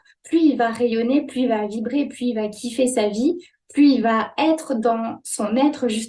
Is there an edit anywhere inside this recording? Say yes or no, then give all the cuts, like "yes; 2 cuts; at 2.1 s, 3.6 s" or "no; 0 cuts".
no; 0 cuts